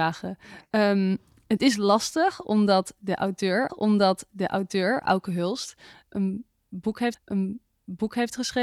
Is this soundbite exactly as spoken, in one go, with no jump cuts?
no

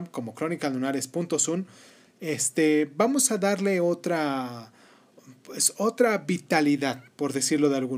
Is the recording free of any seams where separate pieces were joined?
yes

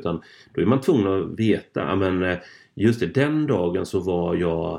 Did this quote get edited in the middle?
no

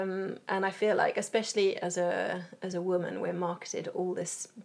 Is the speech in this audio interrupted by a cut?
no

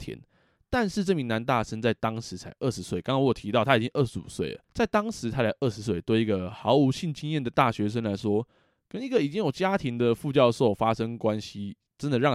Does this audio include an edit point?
yes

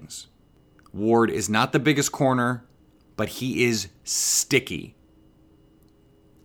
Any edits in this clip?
no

